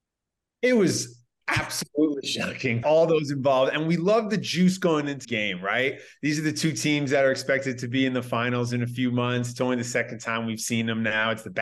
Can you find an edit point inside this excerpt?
yes; 2 cuts; at 2.8 s, 5.2 s

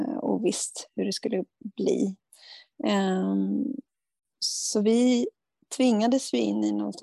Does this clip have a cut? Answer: no; 0 cuts

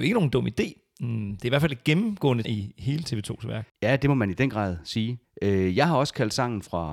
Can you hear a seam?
yes; 3 cuts; at 2.4 s, 3.7 s, 5.2 s

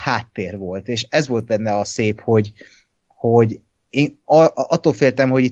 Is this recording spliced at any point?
no; 0 cuts

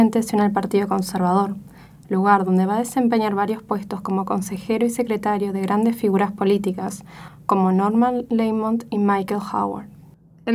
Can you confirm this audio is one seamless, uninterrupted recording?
yes; 0 cuts

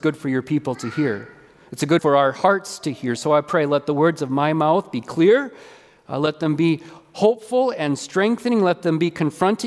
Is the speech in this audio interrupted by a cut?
yes; 1 cut; at 2.0 s

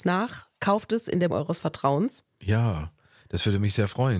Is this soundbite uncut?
no; 1 cut; at 1.3 s

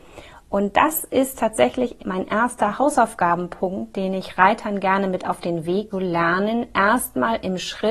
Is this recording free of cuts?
no; 2 cuts; at 2.0 s, 5.9 s

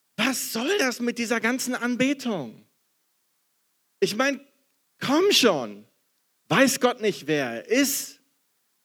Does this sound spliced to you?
no; 0 cuts

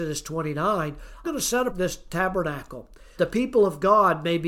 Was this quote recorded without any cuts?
no; 3 cuts; at 1.2 s, 1.7 s, 3.2 s

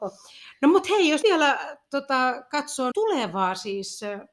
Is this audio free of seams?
no; 2 cuts; at 1.2 s, 2.9 s

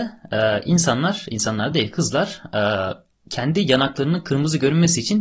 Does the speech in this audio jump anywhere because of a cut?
no; 0 cuts

